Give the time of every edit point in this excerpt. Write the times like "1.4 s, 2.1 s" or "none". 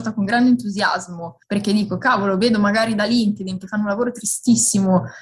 1.4 s